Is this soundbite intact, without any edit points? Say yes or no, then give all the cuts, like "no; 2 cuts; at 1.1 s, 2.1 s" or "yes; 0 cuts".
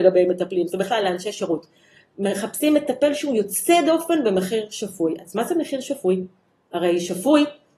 yes; 0 cuts